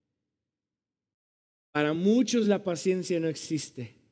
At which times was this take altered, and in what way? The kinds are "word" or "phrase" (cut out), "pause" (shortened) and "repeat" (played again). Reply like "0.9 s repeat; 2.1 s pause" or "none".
none